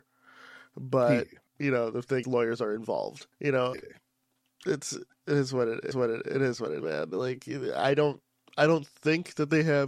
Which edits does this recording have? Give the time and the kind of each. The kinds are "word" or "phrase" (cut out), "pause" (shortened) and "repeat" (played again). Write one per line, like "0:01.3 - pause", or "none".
0:01.5 - pause
0:02.2 - word
0:03.3 - pause
0:03.7 - word
0:05.9 - repeat
0:06.8 - word